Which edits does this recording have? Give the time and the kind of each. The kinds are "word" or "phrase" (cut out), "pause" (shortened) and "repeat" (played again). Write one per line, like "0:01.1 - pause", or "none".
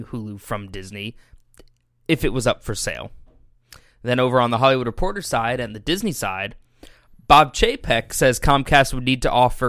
none